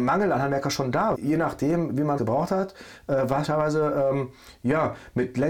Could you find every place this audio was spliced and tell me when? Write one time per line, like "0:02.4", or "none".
0:01.1
0:02.2
0:03.4